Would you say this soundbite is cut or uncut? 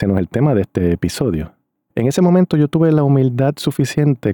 uncut